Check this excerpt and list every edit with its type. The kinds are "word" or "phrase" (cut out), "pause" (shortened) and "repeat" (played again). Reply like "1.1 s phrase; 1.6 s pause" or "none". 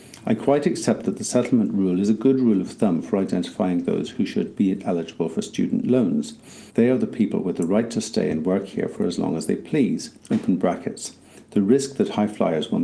6.7 s pause; 10.2 s pause